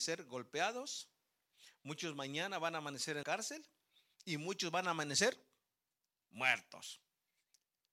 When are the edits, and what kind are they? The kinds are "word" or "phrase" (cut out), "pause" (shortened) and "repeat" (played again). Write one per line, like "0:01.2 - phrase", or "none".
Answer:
0:03.2 - word
0:06.0 - pause